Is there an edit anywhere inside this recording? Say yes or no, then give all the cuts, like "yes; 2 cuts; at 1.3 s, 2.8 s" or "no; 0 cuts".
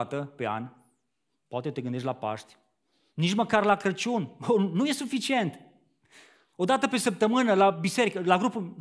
no; 0 cuts